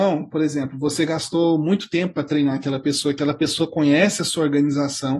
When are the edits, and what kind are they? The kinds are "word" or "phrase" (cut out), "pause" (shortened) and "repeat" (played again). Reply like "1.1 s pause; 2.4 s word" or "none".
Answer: none